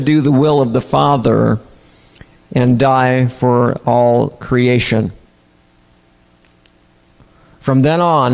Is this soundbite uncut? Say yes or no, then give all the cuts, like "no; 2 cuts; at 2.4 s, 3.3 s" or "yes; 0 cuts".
yes; 0 cuts